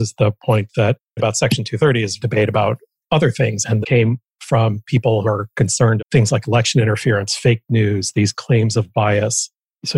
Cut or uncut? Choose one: cut